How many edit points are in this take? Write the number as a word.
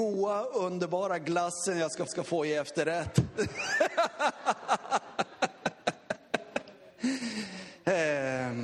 one